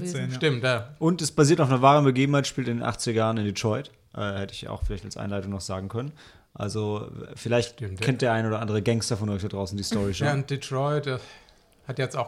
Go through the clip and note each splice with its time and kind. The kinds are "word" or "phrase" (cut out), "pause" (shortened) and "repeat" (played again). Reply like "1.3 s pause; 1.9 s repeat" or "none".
none